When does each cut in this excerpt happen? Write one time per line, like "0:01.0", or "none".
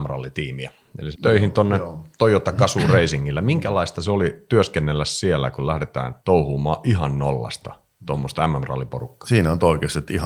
0:01.1
0:06.2